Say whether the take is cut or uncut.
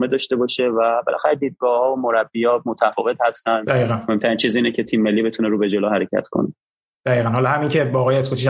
uncut